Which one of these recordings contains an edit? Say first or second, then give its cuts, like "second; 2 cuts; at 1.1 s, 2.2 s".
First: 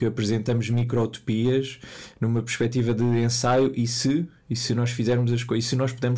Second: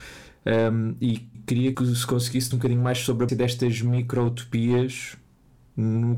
second; 4 cuts; at 1.3 s, 1.7 s, 2.5 s, 3.3 s